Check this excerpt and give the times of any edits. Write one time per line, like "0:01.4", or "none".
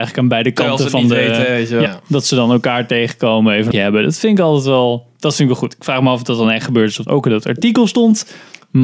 0:01.9
0:03.7
0:07.1